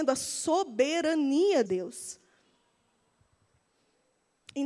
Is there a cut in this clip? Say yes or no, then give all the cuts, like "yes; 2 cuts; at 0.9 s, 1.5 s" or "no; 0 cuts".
yes; 1 cut; at 1.7 s